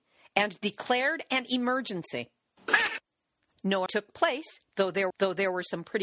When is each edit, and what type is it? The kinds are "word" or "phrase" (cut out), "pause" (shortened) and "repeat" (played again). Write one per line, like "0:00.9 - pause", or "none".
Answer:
0:03.5 - word
0:03.9 - word
0:05.1 - repeat